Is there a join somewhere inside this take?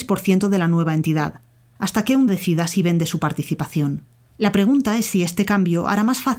yes; 1 cut; at 2.3 s

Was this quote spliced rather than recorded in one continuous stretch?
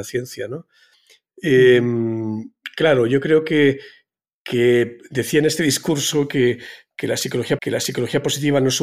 yes; 1 cut; at 7.6 s

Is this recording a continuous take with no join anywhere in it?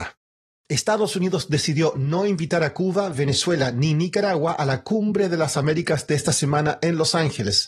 yes; 0 cuts

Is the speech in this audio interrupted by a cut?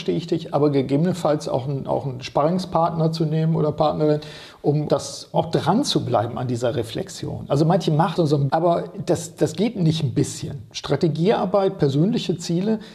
yes; 4 cuts; at 4.9 s, 5.3 s, 8.2 s, 8.5 s

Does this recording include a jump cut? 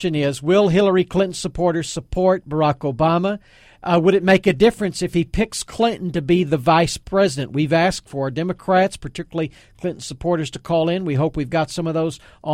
no; 0 cuts

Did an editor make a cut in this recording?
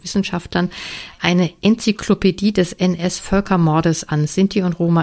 no; 0 cuts

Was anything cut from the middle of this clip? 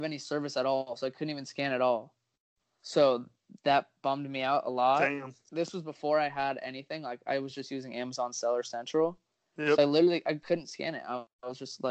no; 0 cuts

